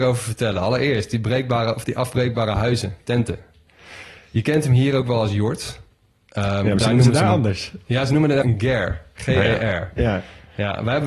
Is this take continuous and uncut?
no; 1 cut; at 8.4 s

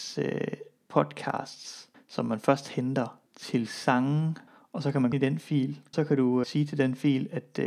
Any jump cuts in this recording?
yes; 6 cuts; at 1.9 s, 3.3 s, 4.5 s, 5.1 s, 5.9 s, 6.4 s

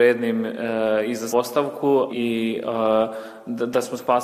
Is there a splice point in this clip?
yes; 2 cuts; at 1.3 s, 2.1 s

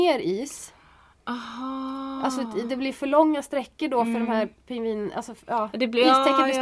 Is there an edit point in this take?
no; 0 cuts

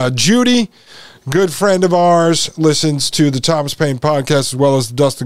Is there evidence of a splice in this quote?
no; 0 cuts

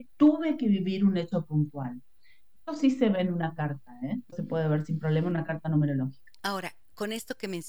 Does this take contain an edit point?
yes; 1 cut; at 4.3 s

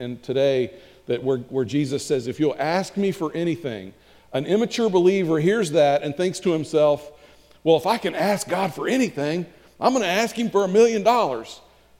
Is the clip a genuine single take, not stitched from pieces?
yes; 0 cuts

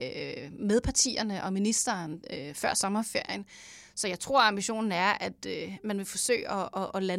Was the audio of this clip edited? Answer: no; 0 cuts

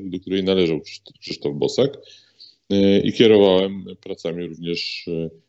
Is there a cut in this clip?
no; 0 cuts

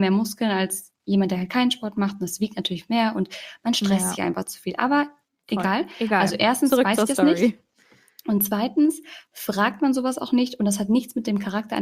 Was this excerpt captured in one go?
yes; 0 cuts

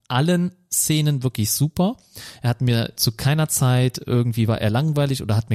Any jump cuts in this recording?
no; 0 cuts

